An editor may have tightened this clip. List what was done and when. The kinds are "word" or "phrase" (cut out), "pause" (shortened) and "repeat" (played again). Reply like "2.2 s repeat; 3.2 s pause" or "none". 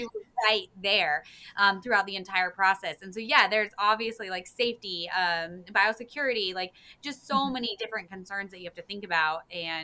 none

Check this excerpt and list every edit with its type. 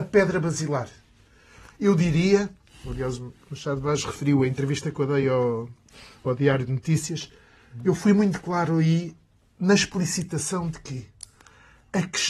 none

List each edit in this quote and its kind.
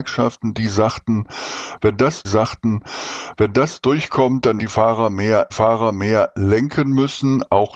2.2 s repeat; 4.6 s word; 5.5 s repeat

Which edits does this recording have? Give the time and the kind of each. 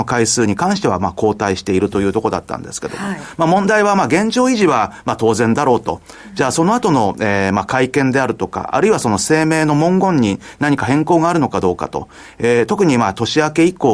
none

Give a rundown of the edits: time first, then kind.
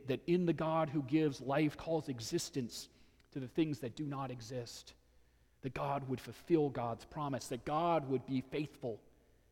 1.8 s phrase

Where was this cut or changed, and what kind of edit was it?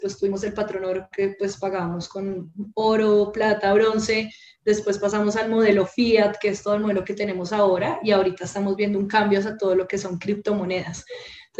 none

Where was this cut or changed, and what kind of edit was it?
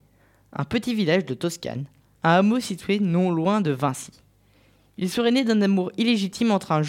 none

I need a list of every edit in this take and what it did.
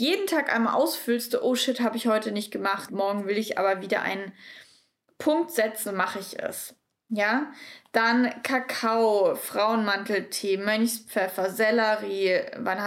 1.3 s word; 2.9 s word; 5.9 s word

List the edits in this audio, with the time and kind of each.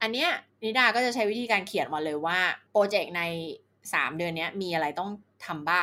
2.7 s pause

